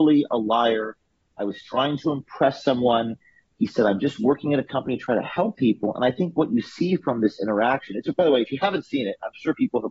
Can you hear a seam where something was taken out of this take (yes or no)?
no